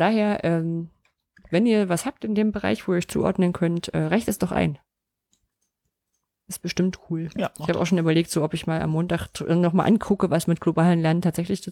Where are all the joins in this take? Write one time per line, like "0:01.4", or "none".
none